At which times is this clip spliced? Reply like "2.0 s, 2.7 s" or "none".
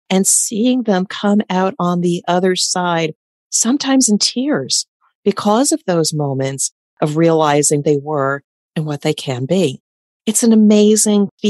7.8 s